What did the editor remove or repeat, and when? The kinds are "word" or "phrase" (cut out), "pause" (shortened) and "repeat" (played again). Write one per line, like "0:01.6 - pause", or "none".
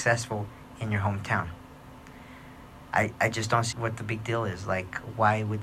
0:03.7 - word